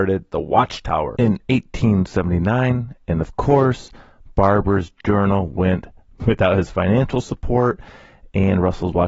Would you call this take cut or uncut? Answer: cut